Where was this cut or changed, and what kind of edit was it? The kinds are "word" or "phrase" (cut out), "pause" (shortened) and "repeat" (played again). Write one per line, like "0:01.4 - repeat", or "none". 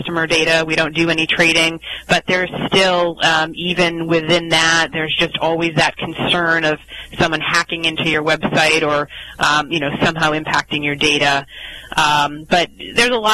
none